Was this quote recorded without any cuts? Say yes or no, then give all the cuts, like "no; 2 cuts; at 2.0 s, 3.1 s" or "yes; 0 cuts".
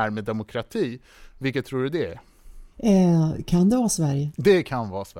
no; 1 cut; at 2.7 s